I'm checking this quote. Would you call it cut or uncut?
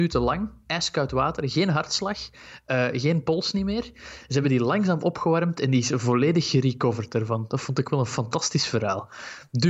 uncut